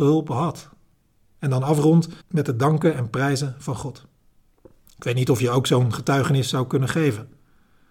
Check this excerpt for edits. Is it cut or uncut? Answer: cut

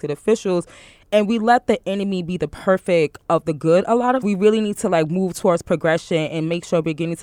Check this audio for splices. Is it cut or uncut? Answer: cut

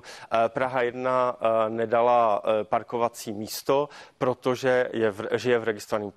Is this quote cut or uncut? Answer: uncut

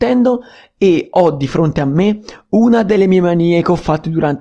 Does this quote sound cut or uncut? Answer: uncut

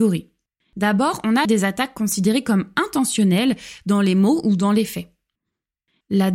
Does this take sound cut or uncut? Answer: cut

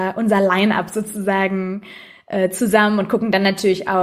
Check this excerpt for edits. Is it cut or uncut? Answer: uncut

